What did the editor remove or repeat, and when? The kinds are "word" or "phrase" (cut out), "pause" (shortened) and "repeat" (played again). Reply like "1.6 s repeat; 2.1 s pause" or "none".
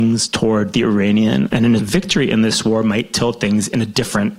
1.5 s word; 1.8 s word